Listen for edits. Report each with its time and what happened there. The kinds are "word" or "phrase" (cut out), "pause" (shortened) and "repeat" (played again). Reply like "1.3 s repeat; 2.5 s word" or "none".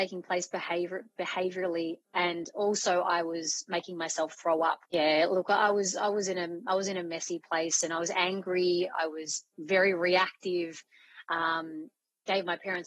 4.9 s pause